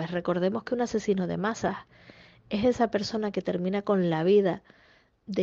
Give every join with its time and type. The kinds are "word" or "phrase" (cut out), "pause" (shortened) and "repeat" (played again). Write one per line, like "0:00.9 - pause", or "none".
none